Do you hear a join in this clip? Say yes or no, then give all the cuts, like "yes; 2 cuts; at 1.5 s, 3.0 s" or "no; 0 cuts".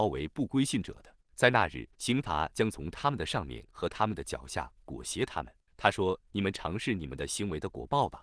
yes; 3 cuts; at 1.2 s, 1.9 s, 5.7 s